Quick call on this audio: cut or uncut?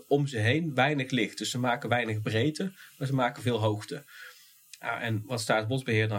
uncut